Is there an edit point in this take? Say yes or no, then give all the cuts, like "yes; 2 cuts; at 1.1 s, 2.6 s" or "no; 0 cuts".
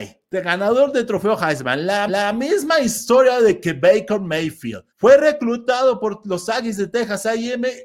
yes; 2 cuts; at 2.1 s, 4.9 s